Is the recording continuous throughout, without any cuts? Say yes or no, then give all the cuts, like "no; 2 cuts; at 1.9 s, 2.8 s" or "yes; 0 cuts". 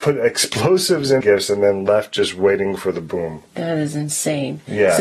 no; 1 cut; at 1.2 s